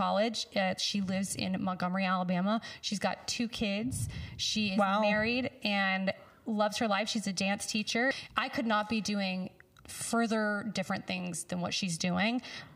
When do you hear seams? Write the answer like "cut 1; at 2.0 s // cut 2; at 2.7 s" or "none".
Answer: none